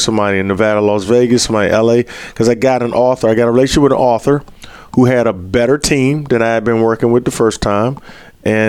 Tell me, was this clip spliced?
no; 0 cuts

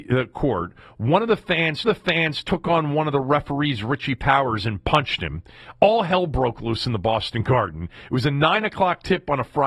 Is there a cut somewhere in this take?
yes; 1 cut; at 1.8 s

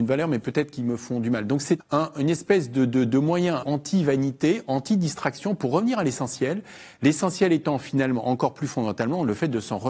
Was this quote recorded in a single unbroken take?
no; 2 cuts; at 1.8 s, 3.6 s

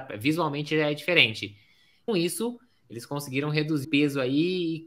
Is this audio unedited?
no; 2 cuts; at 2.1 s, 3.8 s

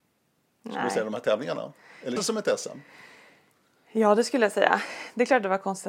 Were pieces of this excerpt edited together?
yes; 1 cut; at 2.2 s

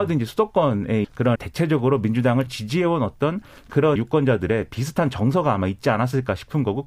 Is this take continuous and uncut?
no; 4 cuts; at 1.0 s, 1.4 s, 2.5 s, 4.0 s

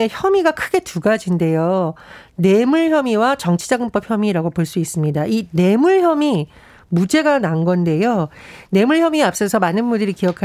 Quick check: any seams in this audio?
no; 0 cuts

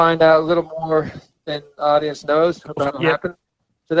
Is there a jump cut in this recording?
yes; 1 cut; at 2.9 s

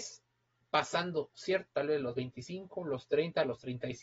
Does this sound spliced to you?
yes; 1 cut; at 1.7 s

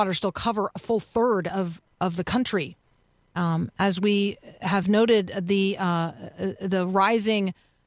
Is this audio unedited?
yes; 0 cuts

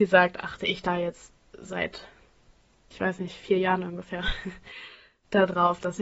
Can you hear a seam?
no; 0 cuts

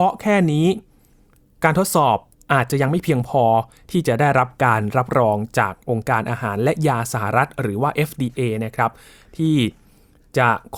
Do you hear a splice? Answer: no; 0 cuts

